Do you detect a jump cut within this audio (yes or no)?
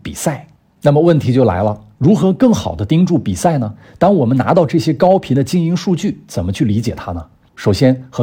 no